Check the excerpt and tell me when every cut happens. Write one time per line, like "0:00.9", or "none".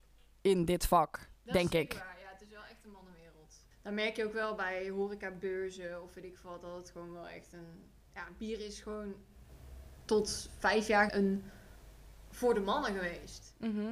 0:03.7
0:11.1